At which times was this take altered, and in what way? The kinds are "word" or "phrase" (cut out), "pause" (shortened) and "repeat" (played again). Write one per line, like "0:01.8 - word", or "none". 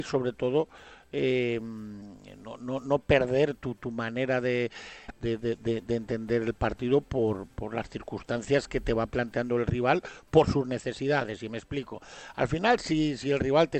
none